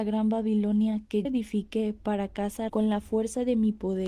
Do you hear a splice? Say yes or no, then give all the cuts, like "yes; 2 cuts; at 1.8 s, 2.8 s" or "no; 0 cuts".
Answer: yes; 2 cuts; at 1.2 s, 2.7 s